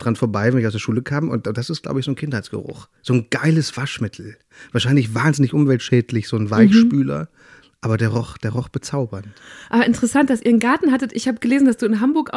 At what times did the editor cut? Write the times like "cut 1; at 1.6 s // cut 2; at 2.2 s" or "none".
cut 1; at 3.0 s